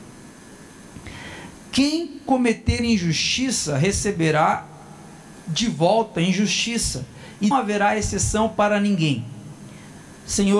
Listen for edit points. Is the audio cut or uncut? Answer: cut